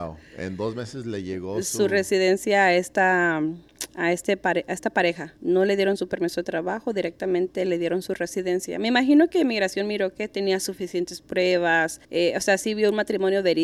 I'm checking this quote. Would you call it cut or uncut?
cut